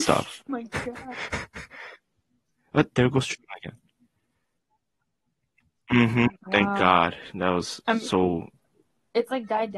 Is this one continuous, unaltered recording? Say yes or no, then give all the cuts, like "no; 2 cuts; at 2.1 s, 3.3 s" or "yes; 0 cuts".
yes; 0 cuts